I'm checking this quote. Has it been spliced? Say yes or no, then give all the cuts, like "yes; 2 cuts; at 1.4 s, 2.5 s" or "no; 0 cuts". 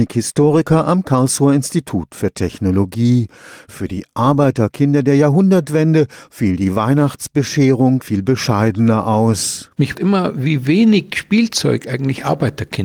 yes; 2 cuts; at 8.0 s, 9.9 s